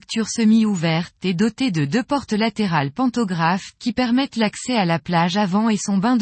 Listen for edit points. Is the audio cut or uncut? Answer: uncut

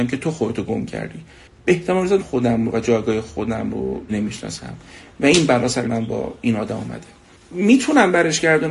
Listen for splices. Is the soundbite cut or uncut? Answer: cut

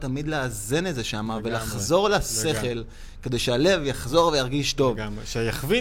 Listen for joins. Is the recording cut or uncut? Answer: uncut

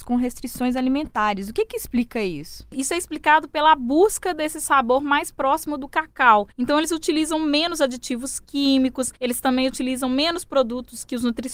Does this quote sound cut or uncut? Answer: cut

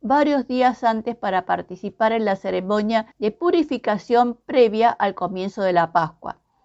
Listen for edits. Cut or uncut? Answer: cut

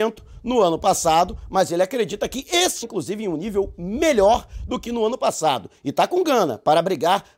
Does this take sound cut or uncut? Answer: cut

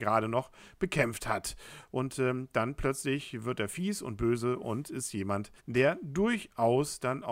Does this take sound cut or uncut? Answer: cut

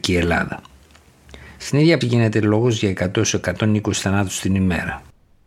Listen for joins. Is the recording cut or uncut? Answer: cut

